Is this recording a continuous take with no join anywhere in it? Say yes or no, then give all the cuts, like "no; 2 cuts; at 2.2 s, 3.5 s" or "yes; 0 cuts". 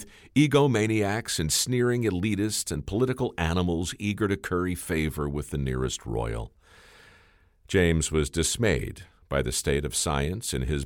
yes; 0 cuts